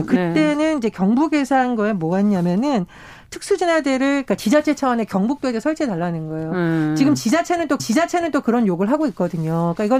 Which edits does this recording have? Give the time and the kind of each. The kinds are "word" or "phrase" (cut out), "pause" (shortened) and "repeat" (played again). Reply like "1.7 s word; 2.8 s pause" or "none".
7.8 s repeat